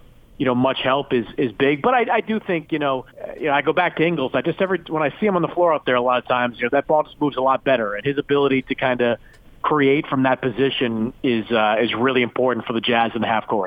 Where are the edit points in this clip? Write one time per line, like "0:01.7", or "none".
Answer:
0:03.1